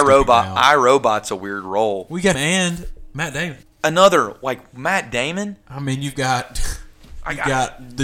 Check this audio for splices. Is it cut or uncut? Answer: cut